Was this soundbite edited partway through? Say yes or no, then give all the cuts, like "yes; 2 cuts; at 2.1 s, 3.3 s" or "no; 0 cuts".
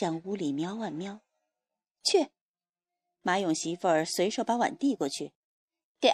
no; 0 cuts